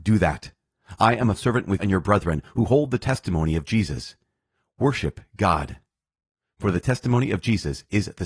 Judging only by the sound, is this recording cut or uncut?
cut